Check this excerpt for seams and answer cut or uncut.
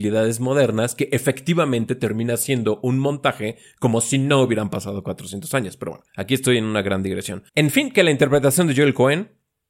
cut